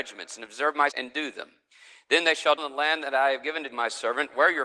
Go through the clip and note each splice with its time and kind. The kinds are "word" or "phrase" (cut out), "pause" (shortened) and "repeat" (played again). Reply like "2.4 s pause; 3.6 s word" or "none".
0.9 s word; 2.6 s word; 3.7 s word